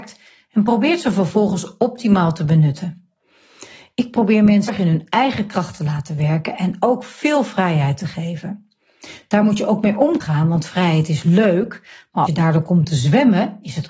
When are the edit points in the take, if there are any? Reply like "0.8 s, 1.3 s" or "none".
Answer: 4.7 s, 10.2 s, 12.3 s